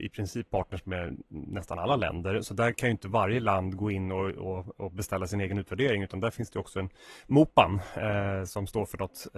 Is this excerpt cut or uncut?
uncut